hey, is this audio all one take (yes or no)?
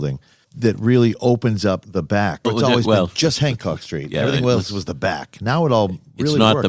no